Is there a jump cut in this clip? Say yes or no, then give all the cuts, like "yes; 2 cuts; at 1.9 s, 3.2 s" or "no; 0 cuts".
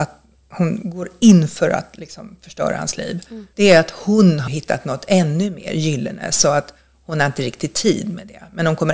yes; 2 cuts; at 3.5 s, 4.5 s